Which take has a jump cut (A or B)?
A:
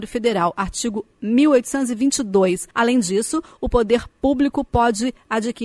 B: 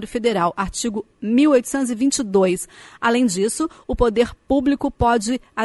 A